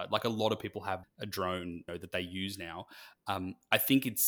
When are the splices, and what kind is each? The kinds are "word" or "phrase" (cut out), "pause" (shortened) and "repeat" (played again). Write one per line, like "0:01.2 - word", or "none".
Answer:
0:01.0 - word
0:01.9 - word